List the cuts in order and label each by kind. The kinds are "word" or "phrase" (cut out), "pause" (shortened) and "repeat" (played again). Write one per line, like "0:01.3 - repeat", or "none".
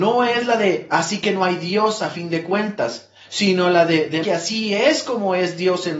0:04.2 - word

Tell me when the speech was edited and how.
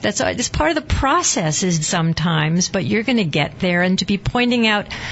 0:01.8 - word

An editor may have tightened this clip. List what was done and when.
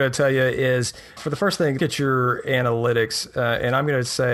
0:01.2 - word
0:01.8 - word

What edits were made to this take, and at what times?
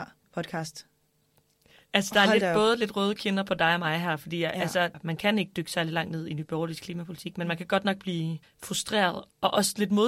0:08.4 - pause

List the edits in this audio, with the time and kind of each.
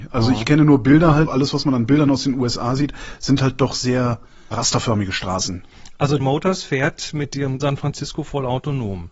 0:01.3 - word
0:04.5 - word
0:06.2 - word
0:07.6 - phrase

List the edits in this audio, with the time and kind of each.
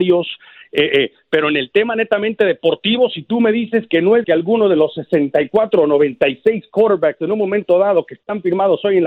0:04.2 - word

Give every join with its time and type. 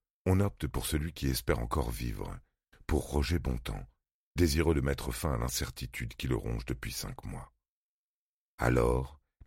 none

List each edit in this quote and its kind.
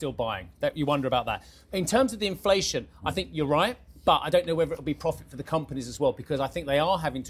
none

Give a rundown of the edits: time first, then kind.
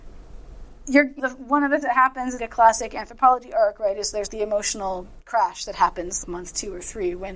0:01.2 - word
0:01.8 - word
0:02.4 - word
0:04.3 - word
0:06.2 - word

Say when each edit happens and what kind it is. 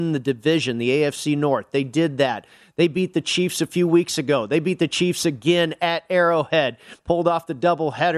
none

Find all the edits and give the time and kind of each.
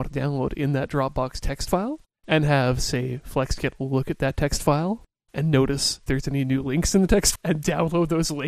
0:05.1 - pause
0:06.1 - word
0:07.4 - word

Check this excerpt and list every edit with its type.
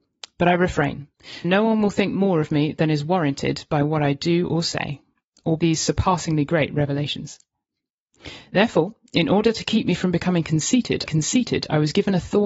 0:01.4 - word
0:05.6 - phrase
0:11.1 - repeat

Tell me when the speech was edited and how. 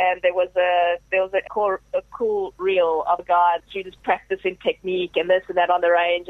0:01.5 - word
0:03.2 - word
0:03.6 - word

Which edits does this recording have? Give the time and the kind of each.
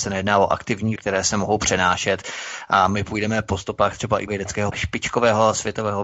0:01.0 - word
0:04.3 - word
0:04.7 - word

